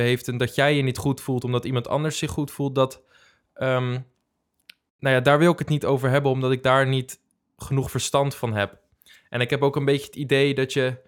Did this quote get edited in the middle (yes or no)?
no